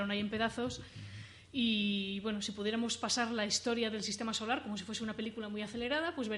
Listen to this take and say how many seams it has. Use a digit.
0